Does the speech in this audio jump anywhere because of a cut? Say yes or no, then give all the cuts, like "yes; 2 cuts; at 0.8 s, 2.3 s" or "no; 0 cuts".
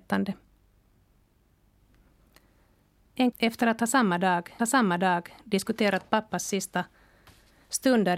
yes; 2 cuts; at 3.3 s, 4.6 s